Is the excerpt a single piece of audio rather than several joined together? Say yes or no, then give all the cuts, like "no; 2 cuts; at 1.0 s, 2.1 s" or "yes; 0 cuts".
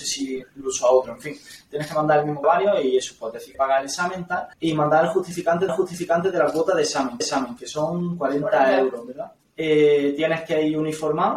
no; 6 cuts; at 2.4 s, 3.5 s, 4.5 s, 5.7 s, 7.2 s, 9.4 s